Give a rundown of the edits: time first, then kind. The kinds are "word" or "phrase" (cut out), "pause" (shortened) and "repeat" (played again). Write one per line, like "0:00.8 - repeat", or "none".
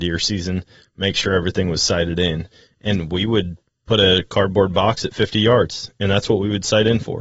none